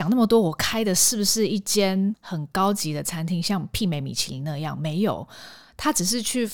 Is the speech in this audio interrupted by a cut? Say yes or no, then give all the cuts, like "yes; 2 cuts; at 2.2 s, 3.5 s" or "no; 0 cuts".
no; 0 cuts